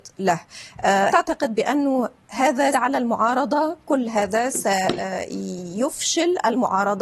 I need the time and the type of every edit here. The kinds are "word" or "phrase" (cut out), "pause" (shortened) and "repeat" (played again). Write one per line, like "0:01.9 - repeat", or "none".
0:01.1 - word
0:02.7 - word